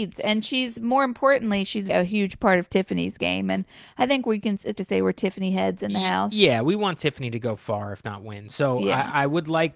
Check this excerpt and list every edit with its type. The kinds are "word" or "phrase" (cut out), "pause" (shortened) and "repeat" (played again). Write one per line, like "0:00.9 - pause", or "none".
0:01.9 - word
0:04.8 - word